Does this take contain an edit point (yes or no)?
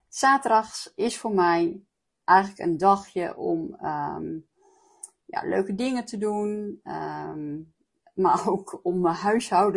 no